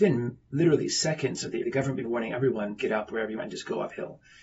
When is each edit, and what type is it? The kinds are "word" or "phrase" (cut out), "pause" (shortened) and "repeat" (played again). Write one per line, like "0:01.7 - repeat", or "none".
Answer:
0:01.6 - word
0:02.0 - word
0:02.8 - word
0:03.4 - word